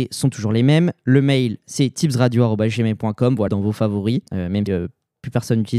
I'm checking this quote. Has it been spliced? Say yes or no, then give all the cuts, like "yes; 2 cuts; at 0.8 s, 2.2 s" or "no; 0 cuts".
yes; 3 cuts; at 3.5 s, 4.3 s, 4.7 s